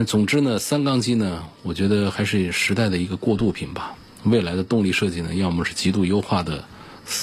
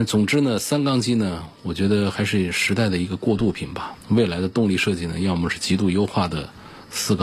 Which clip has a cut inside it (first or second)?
second